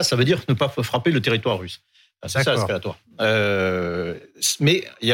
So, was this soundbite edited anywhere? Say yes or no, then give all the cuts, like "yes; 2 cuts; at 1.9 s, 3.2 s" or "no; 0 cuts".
no; 0 cuts